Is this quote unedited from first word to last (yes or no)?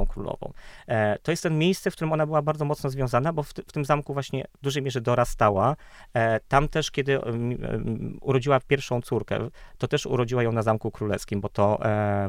yes